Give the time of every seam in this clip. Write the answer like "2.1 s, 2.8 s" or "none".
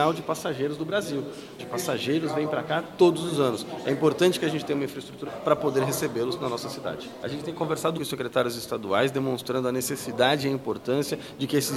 1.6 s, 5.3 s, 8.0 s